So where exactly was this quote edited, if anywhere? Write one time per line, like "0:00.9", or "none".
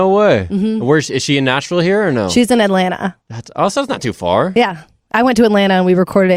0:03.2

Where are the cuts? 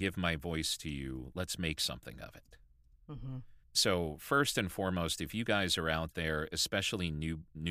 0:03.6

